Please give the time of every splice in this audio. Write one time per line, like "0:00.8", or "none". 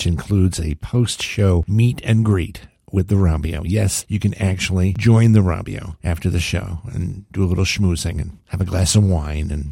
none